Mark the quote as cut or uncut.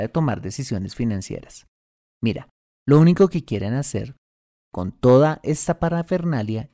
uncut